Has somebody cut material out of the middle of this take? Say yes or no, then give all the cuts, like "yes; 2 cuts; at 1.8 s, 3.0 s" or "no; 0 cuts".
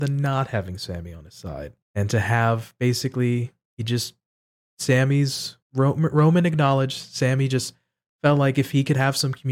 yes; 2 cuts; at 1.8 s, 5.6 s